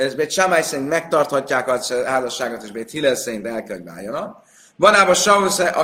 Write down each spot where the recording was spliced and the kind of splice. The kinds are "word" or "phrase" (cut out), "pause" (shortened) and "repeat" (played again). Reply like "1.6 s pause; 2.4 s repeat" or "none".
none